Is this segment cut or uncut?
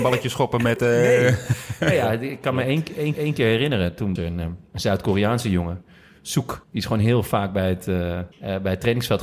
cut